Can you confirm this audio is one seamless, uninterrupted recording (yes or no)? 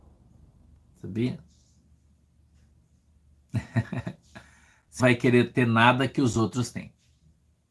no